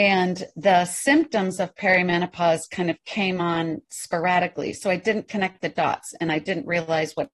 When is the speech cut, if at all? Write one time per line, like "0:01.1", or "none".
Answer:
none

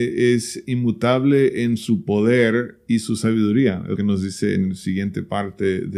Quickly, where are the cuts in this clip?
0:04.0

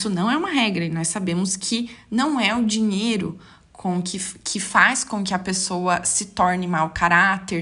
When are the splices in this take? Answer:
none

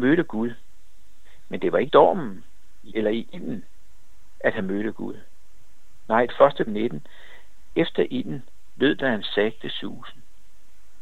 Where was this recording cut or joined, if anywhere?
0:01.9
0:02.9
0:06.3
0:06.7
0:07.7

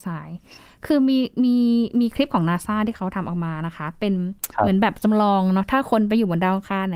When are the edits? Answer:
none

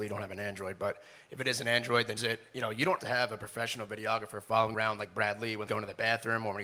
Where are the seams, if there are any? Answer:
0:02.2
0:03.0
0:04.7
0:05.7

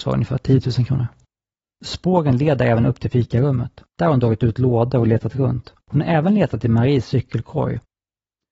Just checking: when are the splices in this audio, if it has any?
0:01.5
0:03.9
0:05.8

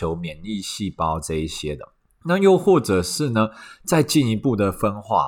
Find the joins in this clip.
0:02.1

